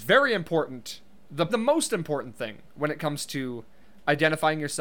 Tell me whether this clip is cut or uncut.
cut